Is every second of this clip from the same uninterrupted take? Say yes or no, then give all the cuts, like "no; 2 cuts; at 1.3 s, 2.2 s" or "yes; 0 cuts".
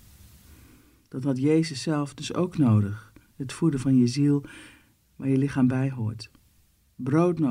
yes; 0 cuts